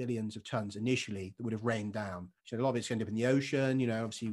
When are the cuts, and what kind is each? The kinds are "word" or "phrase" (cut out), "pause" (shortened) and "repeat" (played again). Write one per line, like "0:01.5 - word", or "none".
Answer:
0:02.4 - pause